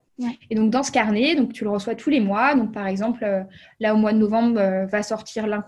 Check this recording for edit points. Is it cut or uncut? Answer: uncut